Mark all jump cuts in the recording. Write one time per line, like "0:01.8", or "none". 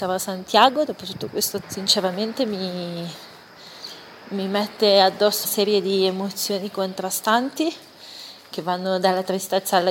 0:01.6
0:05.4